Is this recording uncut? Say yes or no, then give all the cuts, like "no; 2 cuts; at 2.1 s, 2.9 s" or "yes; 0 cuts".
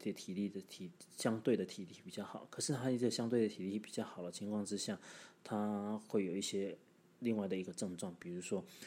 yes; 0 cuts